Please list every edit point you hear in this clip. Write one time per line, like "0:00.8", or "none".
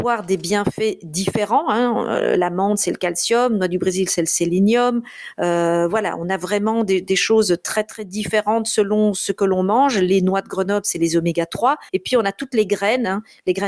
0:11.9